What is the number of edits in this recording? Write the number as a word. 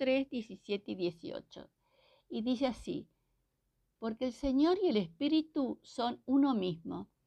zero